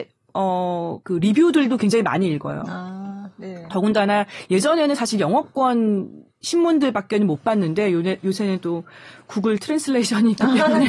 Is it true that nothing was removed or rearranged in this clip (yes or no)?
no